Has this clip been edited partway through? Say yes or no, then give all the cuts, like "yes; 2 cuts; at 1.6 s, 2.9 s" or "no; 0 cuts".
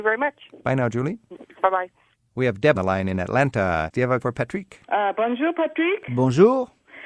yes; 3 cuts; at 2.7 s, 4.2 s, 4.8 s